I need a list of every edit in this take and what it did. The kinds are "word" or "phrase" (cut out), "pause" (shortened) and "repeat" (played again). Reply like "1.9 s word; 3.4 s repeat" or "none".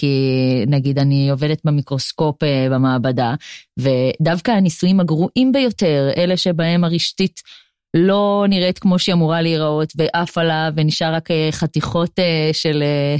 none